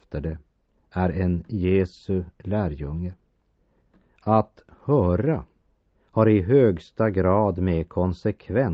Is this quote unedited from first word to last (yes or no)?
yes